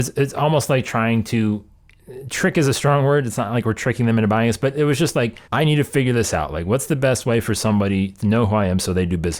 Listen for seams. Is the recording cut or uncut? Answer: cut